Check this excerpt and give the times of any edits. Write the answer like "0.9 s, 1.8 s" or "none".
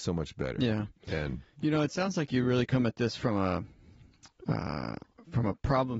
none